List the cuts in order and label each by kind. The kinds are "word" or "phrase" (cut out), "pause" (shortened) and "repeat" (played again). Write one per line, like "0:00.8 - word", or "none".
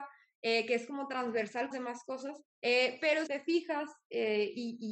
0:01.7 - phrase
0:02.5 - pause
0:03.3 - word